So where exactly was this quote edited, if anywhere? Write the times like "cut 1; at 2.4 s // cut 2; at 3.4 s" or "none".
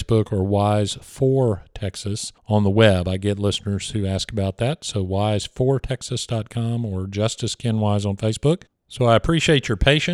cut 1; at 2.4 s // cut 2; at 8.7 s